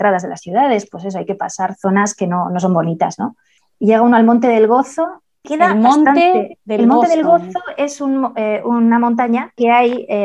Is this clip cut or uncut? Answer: uncut